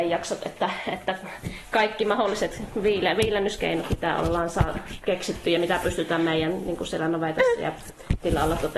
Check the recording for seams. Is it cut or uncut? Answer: uncut